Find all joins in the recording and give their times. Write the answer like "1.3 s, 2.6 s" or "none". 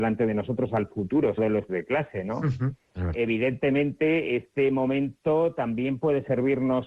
1.4 s, 1.7 s, 3.1 s